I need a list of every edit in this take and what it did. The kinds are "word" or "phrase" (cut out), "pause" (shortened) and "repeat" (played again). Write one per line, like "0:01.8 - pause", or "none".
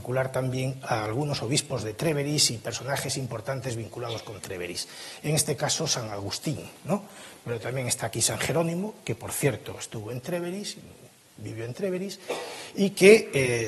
none